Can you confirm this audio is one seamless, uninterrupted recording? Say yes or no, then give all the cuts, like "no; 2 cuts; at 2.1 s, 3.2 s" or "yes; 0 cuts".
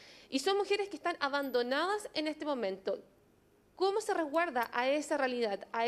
yes; 0 cuts